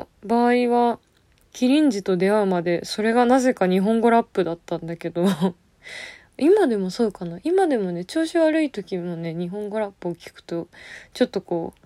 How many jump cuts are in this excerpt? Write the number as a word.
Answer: zero